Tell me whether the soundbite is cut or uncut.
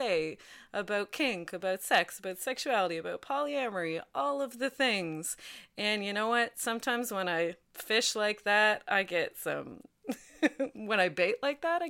uncut